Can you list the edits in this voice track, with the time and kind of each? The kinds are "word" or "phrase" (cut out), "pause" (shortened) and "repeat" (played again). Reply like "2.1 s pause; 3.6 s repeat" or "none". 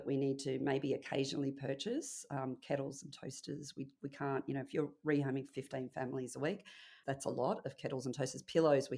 7.0 s word

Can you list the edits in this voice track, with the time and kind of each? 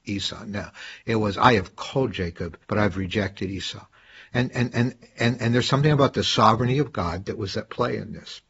2.6 s pause

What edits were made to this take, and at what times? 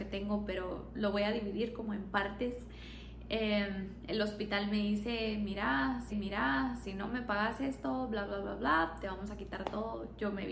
6.1 s repeat

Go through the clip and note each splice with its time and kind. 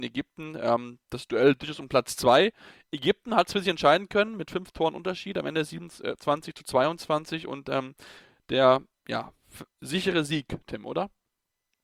none

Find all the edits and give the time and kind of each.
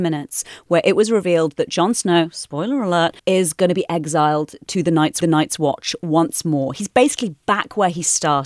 3.2 s pause; 5.2 s repeat

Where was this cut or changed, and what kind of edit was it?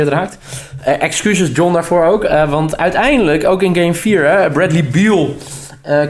none

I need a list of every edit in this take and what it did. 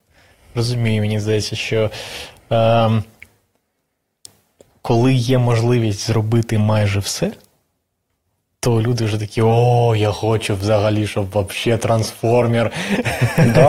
none

